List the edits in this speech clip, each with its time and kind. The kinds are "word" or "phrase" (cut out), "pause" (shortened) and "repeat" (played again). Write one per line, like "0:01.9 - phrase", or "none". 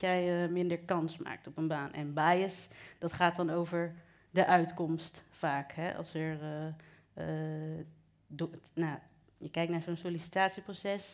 none